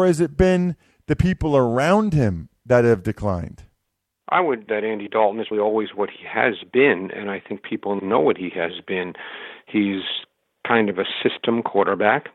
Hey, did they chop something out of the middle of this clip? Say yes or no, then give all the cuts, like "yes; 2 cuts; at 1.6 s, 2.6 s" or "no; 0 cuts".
yes; 3 cuts; at 4.7 s, 5.5 s, 8.0 s